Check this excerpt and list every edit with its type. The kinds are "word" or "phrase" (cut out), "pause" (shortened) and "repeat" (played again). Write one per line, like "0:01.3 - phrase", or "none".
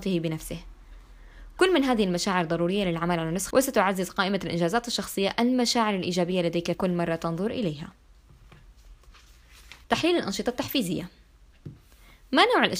0:03.5 - phrase
0:06.7 - word
0:09.8 - pause